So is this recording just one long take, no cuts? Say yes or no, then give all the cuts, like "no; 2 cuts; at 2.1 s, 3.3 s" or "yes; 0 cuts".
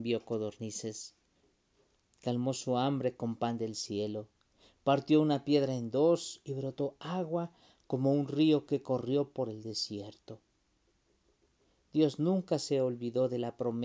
yes; 0 cuts